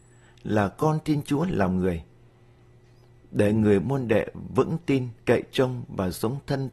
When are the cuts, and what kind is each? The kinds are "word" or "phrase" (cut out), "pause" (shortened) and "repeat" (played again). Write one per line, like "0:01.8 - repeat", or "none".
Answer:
0:05.2 - pause